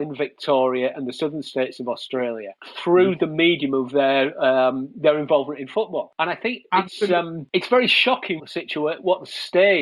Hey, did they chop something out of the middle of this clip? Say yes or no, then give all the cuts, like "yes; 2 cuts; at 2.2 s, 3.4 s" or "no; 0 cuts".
yes; 1 cut; at 8.4 s